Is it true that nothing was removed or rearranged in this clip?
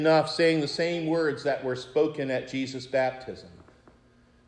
yes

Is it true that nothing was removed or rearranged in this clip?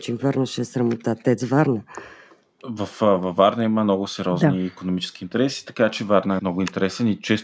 no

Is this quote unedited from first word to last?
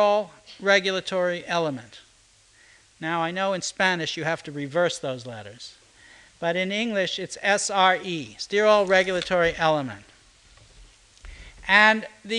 yes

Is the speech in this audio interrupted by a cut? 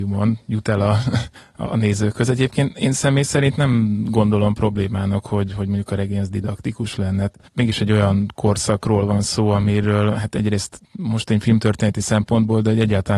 no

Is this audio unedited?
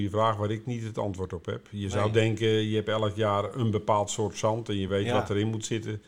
yes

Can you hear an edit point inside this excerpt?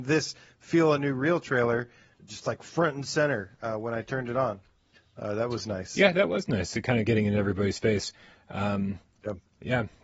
no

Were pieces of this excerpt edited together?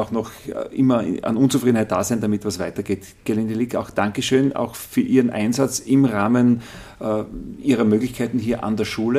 no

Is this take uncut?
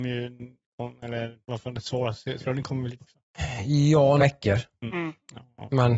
no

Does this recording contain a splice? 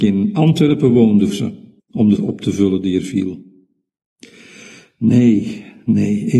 yes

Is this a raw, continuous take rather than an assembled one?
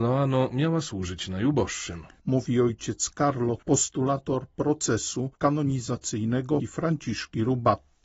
no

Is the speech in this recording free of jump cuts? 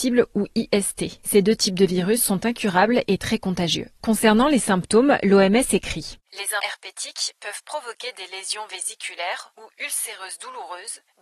no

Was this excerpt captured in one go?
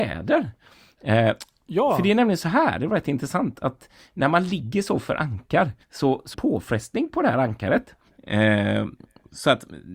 no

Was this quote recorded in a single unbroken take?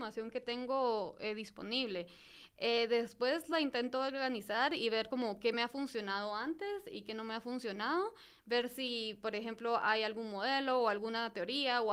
yes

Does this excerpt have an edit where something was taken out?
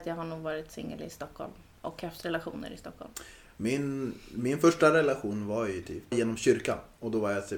yes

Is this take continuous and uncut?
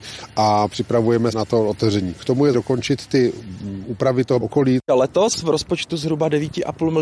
no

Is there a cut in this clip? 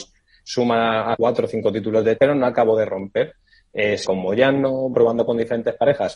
yes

